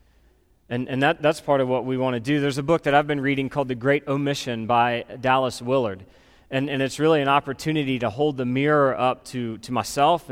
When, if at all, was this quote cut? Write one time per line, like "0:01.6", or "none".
none